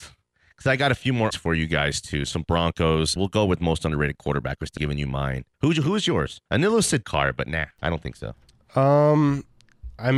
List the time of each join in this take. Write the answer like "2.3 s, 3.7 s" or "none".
1.3 s, 3.2 s, 4.8 s, 5.5 s, 6.5 s, 7.0 s